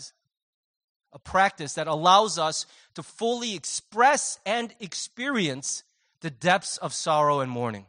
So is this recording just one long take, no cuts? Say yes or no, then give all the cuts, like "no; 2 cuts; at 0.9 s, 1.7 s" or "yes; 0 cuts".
yes; 0 cuts